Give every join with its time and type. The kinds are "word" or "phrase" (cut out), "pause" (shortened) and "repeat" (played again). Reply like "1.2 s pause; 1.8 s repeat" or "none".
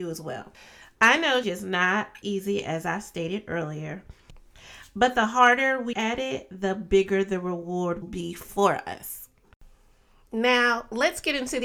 1.4 s word; 2.2 s word; 5.9 s word; 8.0 s word